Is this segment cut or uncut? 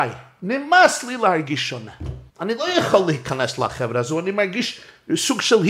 cut